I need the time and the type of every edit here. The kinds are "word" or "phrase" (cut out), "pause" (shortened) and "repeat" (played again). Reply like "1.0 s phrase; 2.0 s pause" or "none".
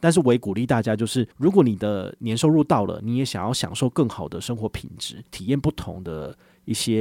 1.3 s pause; 5.3 s pause